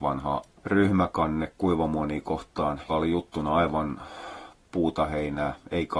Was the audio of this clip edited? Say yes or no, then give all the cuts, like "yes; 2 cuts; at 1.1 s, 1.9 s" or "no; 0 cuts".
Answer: yes; 1 cut; at 2.9 s